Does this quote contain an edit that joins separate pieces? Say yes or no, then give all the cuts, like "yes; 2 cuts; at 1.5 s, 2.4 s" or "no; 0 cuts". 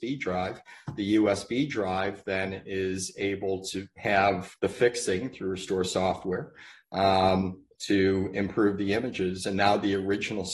yes; 1 cut; at 4.6 s